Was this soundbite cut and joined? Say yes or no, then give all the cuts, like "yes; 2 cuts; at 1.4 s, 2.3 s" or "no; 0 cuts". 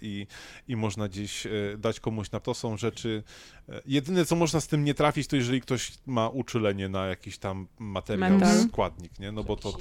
yes; 1 cut; at 2.4 s